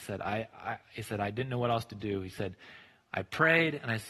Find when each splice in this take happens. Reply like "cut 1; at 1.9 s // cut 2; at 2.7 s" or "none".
none